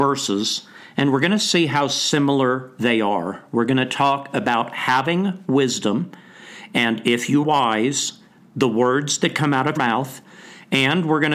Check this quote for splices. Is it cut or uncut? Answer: cut